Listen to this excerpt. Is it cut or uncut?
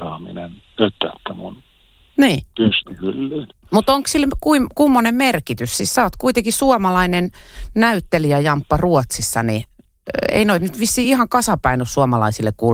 uncut